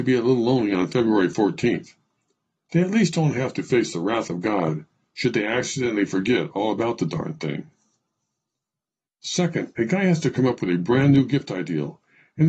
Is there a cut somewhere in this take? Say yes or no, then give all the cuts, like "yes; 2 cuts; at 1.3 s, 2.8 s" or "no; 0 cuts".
no; 0 cuts